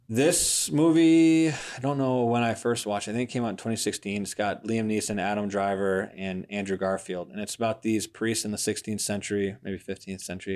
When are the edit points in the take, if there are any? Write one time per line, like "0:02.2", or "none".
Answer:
none